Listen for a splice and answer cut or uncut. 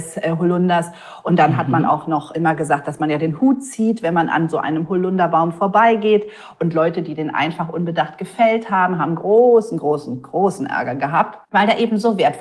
cut